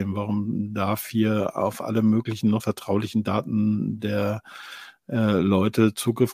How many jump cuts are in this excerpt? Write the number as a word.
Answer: one